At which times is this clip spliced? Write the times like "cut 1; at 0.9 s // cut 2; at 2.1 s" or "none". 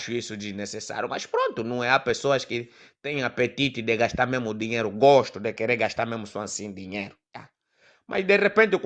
none